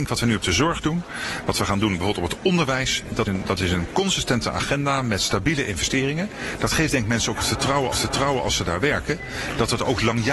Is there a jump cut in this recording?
yes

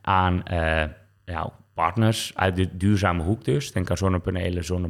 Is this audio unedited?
yes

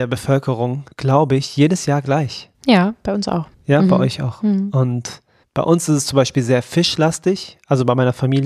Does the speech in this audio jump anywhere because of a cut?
yes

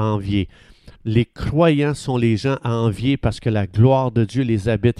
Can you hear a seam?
yes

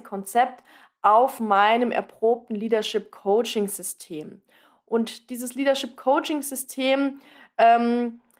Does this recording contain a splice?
no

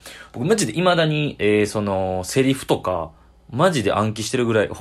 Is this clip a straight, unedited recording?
yes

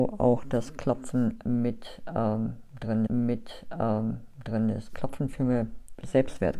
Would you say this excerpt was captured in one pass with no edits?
no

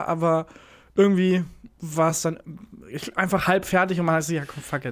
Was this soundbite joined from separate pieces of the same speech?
no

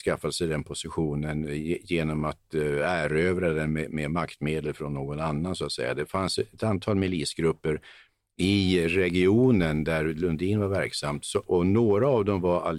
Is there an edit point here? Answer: no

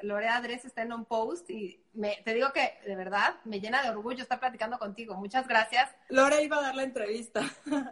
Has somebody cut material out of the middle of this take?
no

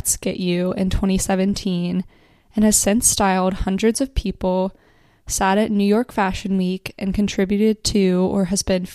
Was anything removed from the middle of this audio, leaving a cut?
no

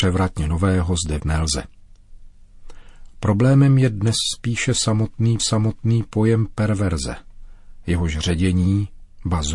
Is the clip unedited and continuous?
no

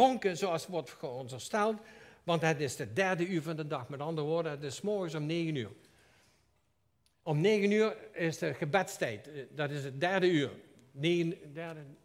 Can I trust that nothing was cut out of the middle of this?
yes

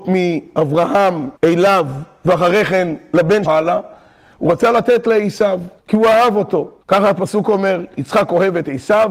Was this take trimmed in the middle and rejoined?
yes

